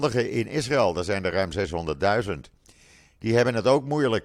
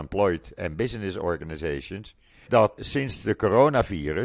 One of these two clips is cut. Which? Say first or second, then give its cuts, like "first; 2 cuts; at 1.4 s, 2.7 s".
second; 2 cuts; at 2.5 s, 2.8 s